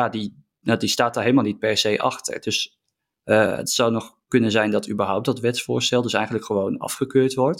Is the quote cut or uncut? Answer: uncut